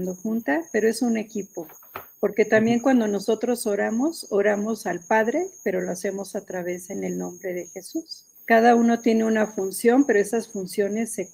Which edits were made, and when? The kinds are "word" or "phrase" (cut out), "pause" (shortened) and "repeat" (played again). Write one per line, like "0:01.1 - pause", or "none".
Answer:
0:02.1 - pause
0:08.3 - pause